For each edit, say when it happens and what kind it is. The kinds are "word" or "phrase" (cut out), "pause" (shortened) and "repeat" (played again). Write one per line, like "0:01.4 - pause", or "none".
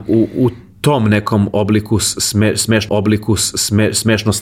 0:02.9 - repeat